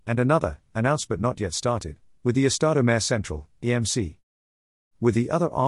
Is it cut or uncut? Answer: uncut